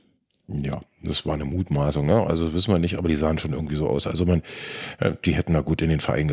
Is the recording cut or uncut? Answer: uncut